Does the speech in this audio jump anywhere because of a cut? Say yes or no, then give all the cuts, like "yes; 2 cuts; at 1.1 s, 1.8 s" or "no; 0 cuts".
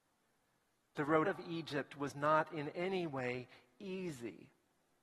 yes; 1 cut; at 1.2 s